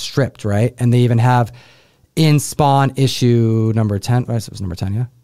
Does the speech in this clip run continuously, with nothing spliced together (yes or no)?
yes